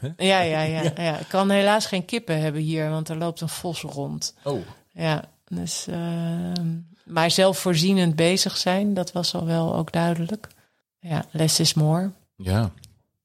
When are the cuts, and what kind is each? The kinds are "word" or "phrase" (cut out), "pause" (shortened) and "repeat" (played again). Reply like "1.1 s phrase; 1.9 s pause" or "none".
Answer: 10.8 s pause